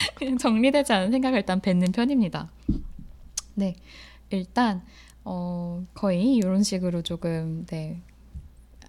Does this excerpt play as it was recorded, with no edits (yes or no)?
yes